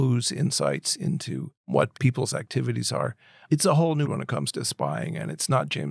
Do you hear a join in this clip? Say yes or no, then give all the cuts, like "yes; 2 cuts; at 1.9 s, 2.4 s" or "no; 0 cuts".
yes; 2 cuts; at 1.9 s, 4.0 s